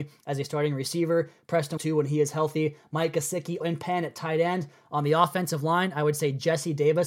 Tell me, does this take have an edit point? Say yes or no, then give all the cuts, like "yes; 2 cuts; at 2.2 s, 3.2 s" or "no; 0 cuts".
yes; 2 cuts; at 1.8 s, 3.6 s